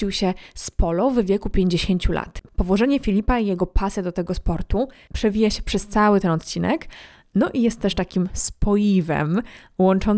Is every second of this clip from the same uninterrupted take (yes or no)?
yes